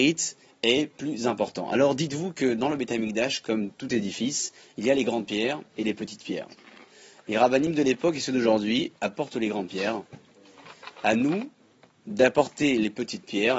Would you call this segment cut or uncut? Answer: uncut